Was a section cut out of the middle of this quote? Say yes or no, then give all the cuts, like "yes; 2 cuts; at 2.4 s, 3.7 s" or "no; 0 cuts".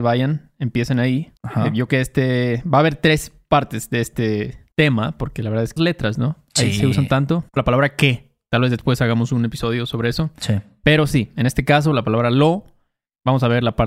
yes; 5 cuts; at 1.4 s, 1.9 s, 4.7 s, 5.8 s, 7.6 s